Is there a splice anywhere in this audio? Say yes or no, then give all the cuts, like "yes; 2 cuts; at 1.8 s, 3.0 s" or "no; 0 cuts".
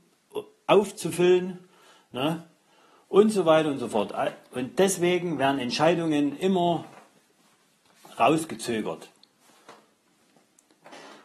no; 0 cuts